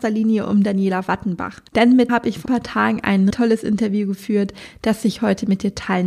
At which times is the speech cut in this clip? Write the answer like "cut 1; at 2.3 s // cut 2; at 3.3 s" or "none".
cut 1; at 2.1 s // cut 2; at 2.5 s // cut 3; at 3.3 s